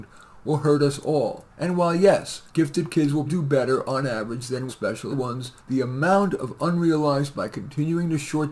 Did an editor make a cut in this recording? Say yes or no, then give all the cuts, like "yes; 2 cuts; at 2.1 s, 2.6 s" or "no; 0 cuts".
yes; 7 cuts; at 1.5 s, 2.5 s, 3.3 s, 4.7 s, 5.1 s, 5.6 s, 7.3 s